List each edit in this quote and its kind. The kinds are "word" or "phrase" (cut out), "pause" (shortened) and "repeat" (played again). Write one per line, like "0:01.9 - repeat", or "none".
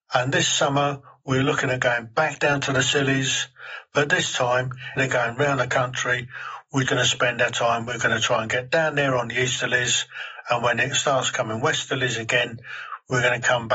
0:05.0 - word
0:06.9 - word